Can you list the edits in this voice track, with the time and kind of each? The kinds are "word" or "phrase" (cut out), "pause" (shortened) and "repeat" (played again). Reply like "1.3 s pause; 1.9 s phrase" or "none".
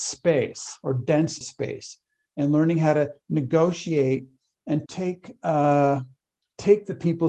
1.4 s word; 4.9 s word